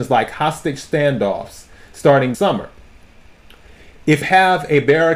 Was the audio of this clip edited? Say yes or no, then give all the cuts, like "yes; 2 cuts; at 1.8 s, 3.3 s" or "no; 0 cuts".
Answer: yes; 2 cuts; at 2.3 s, 4.2 s